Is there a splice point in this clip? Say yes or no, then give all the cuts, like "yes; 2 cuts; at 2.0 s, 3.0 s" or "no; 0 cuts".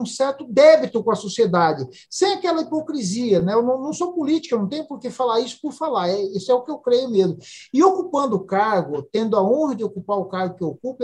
no; 0 cuts